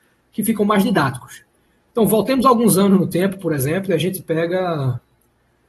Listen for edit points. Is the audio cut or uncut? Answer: uncut